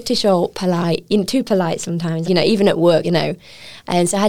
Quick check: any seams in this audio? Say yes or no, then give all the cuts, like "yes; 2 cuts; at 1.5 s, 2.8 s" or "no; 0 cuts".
yes; 2 cuts; at 2.2 s, 3.0 s